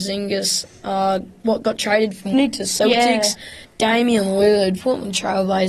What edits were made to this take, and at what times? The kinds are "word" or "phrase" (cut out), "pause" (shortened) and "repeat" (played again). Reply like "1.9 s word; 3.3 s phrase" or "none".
2.3 s phrase; 4.8 s phrase